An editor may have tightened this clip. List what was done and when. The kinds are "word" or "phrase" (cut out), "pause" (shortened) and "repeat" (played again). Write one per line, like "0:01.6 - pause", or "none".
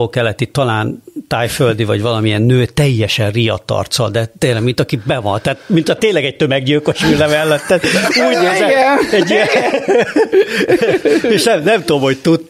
none